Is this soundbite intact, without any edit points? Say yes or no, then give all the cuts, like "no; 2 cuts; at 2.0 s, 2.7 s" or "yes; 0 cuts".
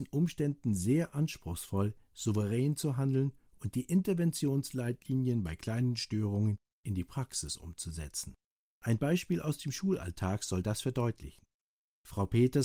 yes; 0 cuts